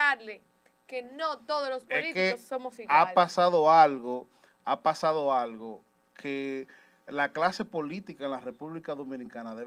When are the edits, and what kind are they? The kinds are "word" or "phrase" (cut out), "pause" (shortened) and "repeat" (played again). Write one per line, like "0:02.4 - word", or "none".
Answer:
none